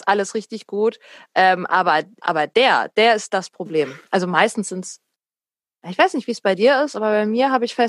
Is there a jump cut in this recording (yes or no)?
yes